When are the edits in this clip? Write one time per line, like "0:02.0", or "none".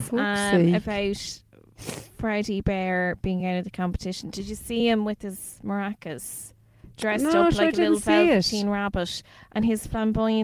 none